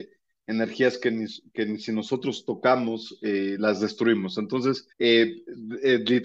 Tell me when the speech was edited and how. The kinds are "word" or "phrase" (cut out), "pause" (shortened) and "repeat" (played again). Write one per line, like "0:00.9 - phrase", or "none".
0:04.9 - pause